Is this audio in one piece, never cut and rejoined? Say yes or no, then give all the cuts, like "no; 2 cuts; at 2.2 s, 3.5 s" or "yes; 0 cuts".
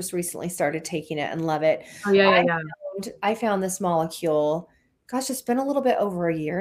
yes; 0 cuts